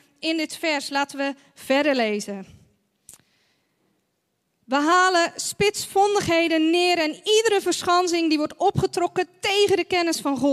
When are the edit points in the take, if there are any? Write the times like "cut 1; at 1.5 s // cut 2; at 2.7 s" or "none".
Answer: none